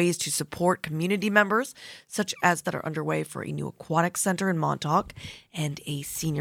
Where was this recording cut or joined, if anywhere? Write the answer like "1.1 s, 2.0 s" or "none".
2.6 s